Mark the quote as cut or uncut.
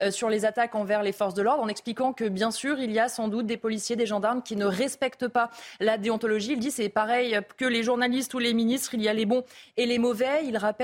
uncut